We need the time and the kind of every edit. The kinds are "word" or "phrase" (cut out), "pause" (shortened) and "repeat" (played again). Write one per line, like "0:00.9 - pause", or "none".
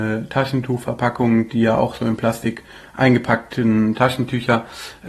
none